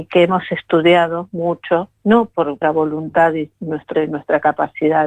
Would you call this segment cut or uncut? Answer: cut